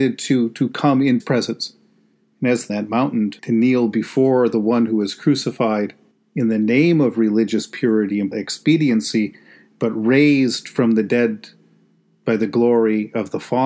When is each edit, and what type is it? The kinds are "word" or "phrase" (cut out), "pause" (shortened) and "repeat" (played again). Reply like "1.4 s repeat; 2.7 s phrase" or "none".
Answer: 1.2 s word; 2.7 s phrase; 3.4 s pause; 6.1 s pause; 8.3 s word